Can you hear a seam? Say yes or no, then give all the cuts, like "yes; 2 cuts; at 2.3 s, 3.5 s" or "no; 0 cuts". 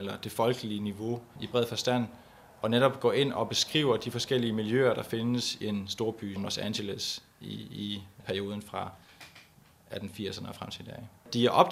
yes; 2 cuts; at 5.6 s, 6.4 s